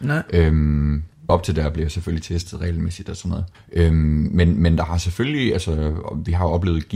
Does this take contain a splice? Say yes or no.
yes